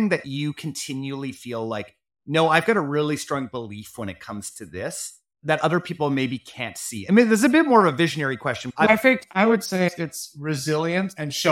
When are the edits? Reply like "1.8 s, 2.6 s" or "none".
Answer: 8.9 s